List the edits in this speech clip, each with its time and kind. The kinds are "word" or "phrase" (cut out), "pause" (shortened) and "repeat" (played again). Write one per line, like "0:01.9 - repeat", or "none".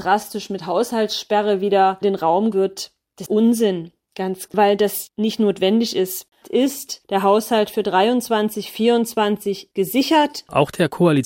0:02.0 - word
0:02.5 - word
0:03.3 - word
0:04.5 - word
0:06.4 - word
0:09.7 - word